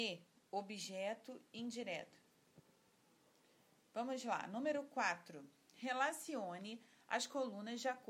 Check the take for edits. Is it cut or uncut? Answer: uncut